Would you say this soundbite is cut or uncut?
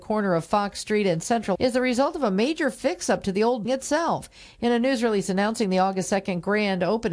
cut